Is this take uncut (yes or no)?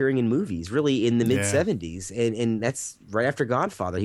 yes